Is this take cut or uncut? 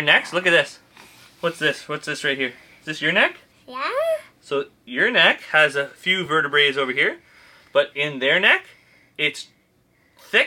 uncut